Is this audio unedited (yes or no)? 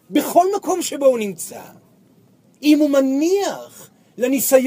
yes